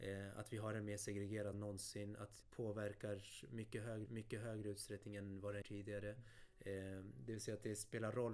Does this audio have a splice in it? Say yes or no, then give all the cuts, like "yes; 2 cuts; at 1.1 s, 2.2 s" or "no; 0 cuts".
yes; 4 cuts; at 1.5 s, 2.4 s, 4.1 s, 5.6 s